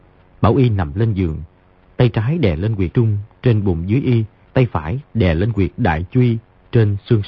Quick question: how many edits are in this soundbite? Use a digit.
2